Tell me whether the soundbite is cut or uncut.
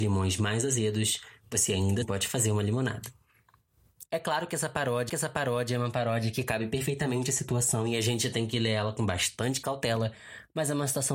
cut